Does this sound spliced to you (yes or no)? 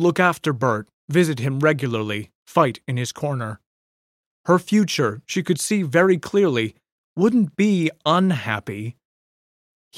no